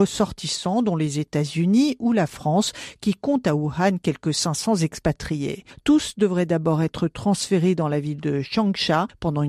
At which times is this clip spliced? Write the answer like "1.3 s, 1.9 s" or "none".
none